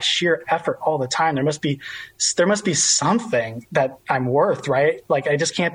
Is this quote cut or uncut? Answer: uncut